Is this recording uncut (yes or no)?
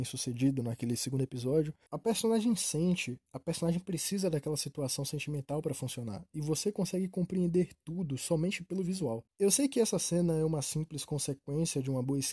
yes